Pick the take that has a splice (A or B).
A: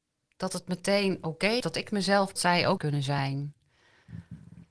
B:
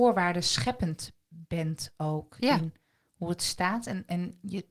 A